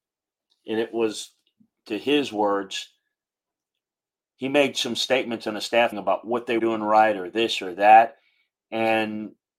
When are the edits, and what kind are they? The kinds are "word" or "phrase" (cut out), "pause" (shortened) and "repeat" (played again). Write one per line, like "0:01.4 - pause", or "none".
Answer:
0:05.9 - word
0:06.6 - word